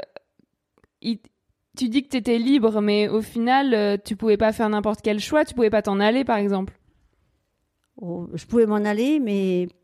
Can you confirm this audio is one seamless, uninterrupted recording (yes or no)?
yes